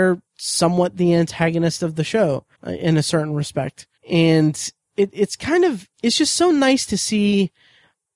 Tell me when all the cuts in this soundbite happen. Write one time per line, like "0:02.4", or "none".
0:02.5
0:04.0
0:05.9